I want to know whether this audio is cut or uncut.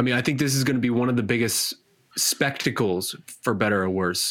uncut